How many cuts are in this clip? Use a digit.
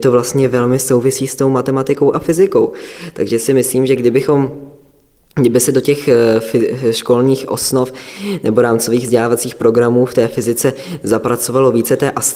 0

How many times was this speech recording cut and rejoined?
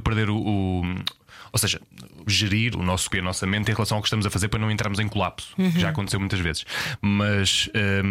3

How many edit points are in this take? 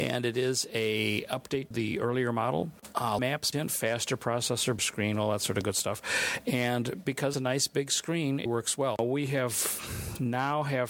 6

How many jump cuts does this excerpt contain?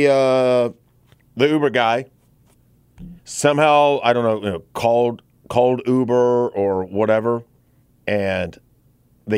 3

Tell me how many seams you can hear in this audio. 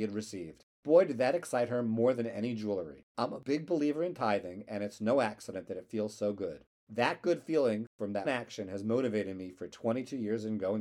1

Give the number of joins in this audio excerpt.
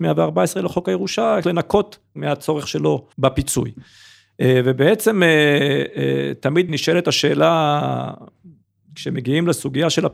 3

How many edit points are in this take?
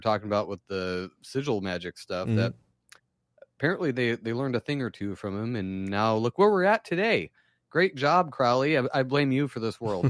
0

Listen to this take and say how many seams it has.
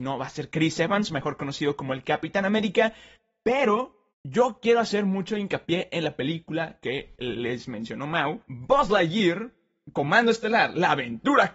2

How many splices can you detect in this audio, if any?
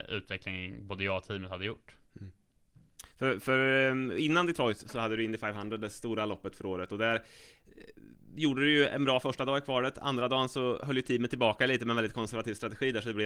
0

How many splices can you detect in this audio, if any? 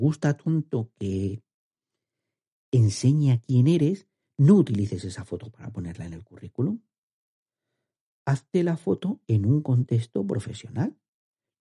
0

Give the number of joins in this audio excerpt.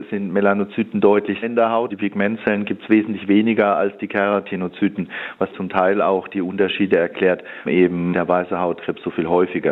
5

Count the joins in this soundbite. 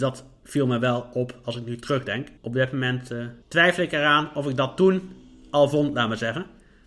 2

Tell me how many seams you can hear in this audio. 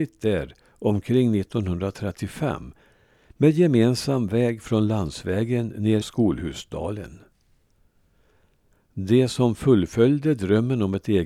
1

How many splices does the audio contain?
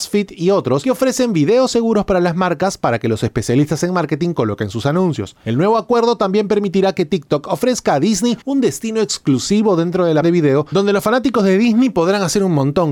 1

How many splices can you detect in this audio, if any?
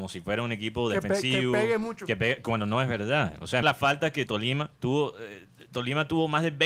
3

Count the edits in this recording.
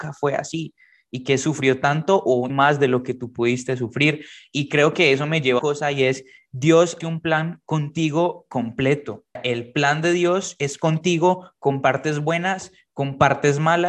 4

